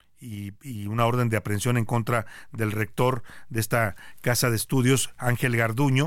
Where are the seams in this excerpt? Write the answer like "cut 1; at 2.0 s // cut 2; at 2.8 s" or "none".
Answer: none